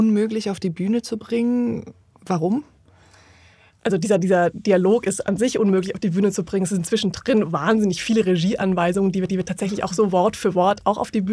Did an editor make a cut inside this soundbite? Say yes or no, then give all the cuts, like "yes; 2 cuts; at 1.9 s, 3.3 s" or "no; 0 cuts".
yes; 1 cut; at 9.3 s